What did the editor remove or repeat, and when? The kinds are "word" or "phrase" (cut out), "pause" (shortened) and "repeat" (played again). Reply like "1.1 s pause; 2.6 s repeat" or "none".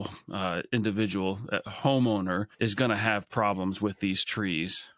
2.5 s pause